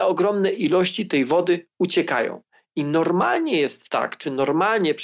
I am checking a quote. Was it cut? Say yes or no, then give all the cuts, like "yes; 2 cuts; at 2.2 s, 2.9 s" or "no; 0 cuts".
no; 0 cuts